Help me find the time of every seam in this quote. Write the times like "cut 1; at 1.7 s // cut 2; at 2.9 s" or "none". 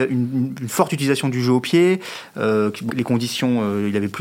cut 1; at 2.9 s